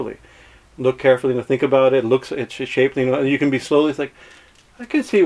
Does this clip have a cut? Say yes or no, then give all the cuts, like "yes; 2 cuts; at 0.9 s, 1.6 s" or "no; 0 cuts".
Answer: no; 0 cuts